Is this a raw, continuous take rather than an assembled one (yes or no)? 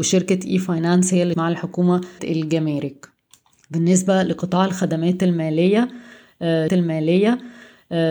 no